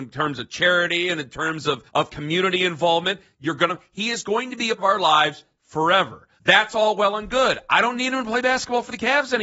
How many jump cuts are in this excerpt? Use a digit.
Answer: 4